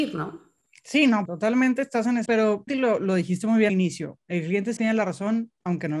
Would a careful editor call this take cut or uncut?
cut